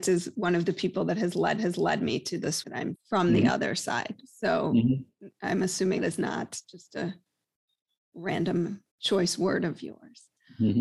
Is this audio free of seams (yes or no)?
no